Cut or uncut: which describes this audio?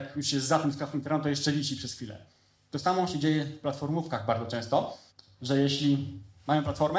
cut